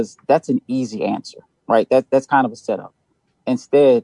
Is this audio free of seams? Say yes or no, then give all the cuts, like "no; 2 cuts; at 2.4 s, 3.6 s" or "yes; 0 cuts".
yes; 0 cuts